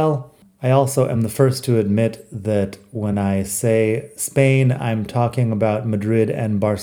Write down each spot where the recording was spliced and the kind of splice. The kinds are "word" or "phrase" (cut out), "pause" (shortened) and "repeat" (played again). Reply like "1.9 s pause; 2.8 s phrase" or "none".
none